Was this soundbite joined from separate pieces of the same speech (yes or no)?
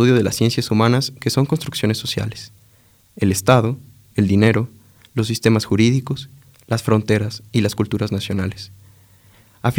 no